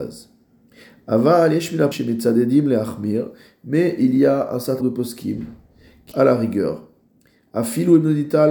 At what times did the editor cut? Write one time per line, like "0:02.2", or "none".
0:01.9
0:04.8
0:06.1